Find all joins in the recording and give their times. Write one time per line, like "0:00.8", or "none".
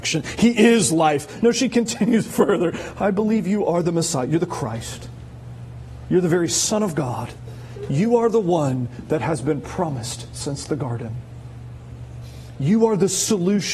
none